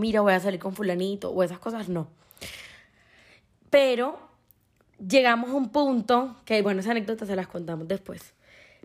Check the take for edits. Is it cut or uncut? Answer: uncut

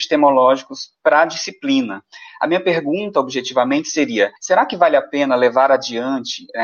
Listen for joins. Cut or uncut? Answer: cut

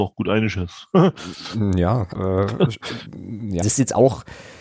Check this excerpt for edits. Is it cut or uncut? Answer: cut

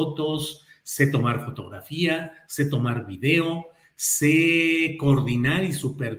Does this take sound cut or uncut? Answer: uncut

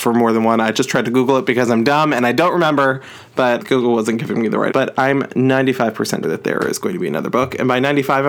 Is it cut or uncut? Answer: cut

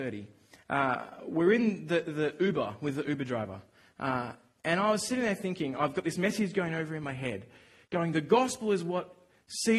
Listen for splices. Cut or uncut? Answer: uncut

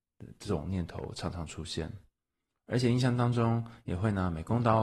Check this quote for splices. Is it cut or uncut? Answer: uncut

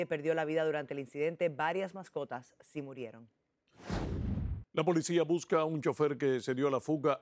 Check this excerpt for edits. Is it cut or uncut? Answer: uncut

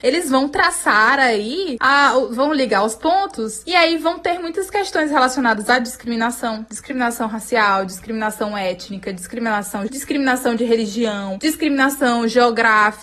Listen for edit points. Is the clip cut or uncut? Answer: cut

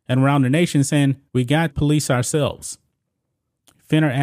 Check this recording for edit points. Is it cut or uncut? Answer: cut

